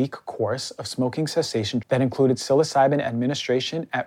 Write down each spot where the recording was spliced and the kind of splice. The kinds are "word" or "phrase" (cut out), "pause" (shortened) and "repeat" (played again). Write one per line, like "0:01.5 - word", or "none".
0:01.8 - word